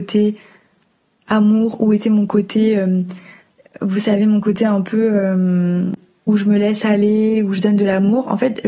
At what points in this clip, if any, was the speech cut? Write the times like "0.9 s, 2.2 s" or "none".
none